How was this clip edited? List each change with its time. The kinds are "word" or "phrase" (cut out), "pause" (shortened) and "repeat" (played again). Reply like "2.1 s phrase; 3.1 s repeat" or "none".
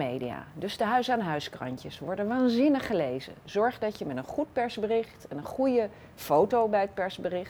none